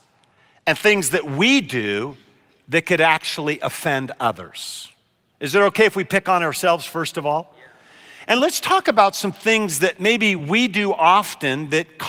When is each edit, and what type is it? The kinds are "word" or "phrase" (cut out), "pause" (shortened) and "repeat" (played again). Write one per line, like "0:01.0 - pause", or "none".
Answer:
none

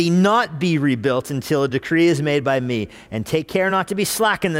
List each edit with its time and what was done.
none

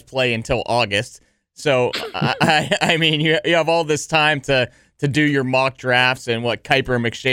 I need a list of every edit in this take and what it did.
none

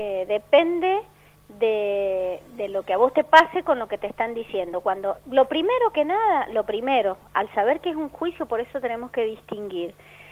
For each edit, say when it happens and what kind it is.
none

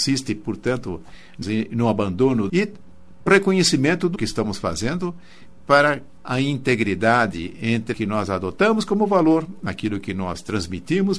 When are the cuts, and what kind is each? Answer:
0:01.4 - phrase
0:02.5 - phrase
0:03.3 - word
0:04.2 - word
0:06.2 - word
0:07.9 - word

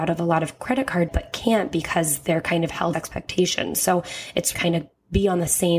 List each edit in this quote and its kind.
0:01.1 - word
0:02.9 - phrase
0:04.5 - phrase

